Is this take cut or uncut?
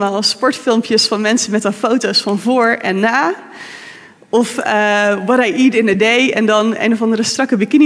uncut